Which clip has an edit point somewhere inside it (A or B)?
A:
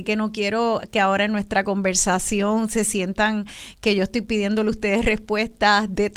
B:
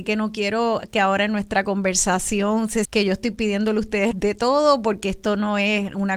B